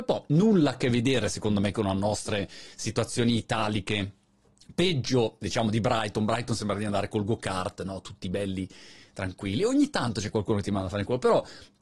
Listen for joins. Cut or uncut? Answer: uncut